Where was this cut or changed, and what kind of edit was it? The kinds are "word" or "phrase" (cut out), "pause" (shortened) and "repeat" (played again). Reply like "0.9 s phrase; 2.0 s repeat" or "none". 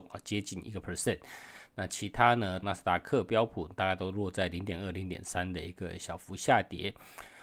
2.6 s phrase